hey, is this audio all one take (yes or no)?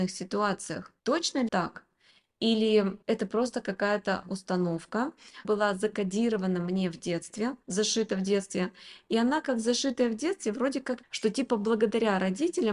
no